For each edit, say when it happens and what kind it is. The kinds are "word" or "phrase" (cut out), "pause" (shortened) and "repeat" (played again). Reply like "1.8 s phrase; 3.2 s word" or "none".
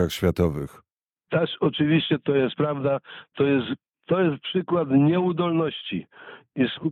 none